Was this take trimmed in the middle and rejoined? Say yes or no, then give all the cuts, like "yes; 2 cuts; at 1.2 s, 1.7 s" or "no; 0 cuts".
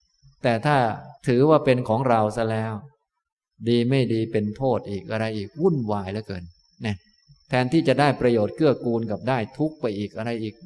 yes; 1 cut; at 1.2 s